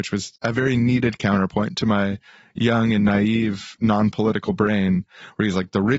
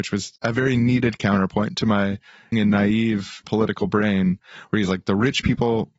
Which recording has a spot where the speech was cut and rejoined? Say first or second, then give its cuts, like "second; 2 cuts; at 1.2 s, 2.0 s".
second; 2 cuts; at 2.5 s, 3.4 s